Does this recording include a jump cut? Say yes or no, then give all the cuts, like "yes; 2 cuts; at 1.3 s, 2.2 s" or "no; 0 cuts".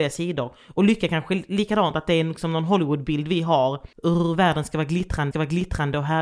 yes; 2 cuts; at 3.9 s, 5.3 s